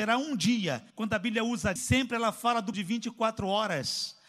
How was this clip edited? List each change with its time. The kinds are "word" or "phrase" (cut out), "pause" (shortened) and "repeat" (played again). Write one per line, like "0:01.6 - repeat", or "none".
0:00.9 - pause
0:01.8 - phrase
0:02.7 - word